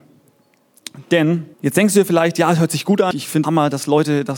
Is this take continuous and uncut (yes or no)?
no